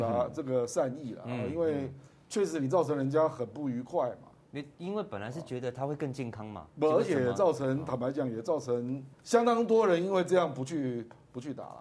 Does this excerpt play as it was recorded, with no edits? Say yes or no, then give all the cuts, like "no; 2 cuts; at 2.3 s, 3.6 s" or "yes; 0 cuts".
no; 1 cut; at 9.1 s